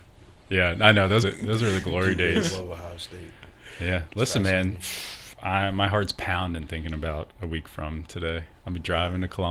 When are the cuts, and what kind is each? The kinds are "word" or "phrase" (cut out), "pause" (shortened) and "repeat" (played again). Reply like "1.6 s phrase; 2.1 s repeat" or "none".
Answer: 1.2 s word